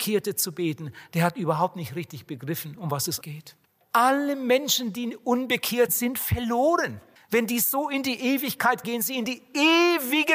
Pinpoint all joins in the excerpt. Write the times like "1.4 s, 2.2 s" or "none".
3.2 s, 3.6 s, 5.9 s, 7.2 s, 8.8 s